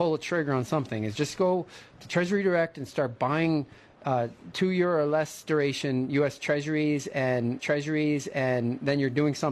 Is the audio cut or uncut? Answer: cut